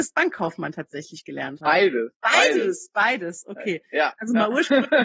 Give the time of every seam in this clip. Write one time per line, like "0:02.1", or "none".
0:02.1